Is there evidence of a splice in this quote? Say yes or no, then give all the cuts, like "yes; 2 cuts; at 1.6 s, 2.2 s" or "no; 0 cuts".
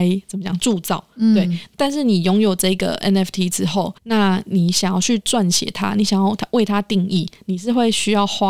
yes; 1 cut; at 4.0 s